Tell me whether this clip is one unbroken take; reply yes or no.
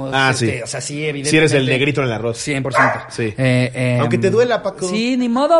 yes